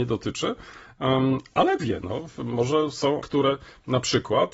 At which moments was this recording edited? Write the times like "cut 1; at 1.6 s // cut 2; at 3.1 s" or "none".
cut 1; at 1.8 s // cut 2; at 3.2 s